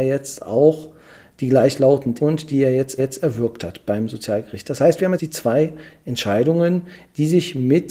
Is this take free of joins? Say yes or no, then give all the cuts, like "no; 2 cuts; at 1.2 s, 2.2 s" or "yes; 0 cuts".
no; 3 cuts; at 2.2 s, 3.0 s, 5.2 s